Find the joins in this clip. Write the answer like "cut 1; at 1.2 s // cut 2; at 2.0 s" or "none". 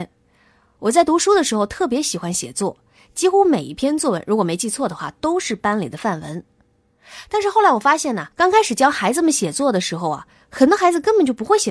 cut 1; at 8.3 s